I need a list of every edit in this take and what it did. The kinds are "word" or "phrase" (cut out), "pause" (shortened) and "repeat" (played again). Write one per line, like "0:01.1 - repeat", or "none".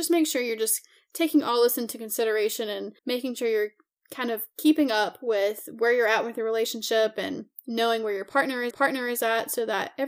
0:03.0 - pause
0:08.7 - repeat